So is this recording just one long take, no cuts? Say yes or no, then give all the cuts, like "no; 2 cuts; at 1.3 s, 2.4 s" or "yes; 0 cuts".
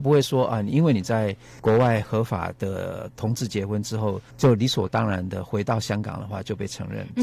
no; 1 cut; at 4.3 s